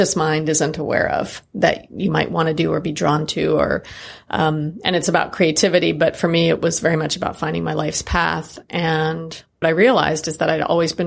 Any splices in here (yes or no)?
yes